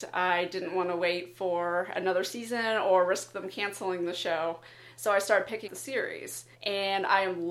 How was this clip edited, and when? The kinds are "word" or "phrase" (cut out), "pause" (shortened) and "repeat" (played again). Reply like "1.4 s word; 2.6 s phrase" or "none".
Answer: 5.7 s word; 6.5 s pause